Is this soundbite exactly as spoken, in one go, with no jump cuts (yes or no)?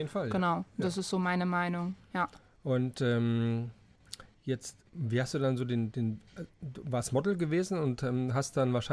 no